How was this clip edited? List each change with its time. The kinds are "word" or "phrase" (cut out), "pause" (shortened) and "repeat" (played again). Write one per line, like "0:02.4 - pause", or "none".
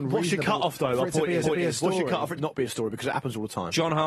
0:01.4 - repeat
0:02.4 - phrase